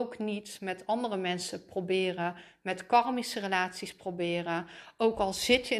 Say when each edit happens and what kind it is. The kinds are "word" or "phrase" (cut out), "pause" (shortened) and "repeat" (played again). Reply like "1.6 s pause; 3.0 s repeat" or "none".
none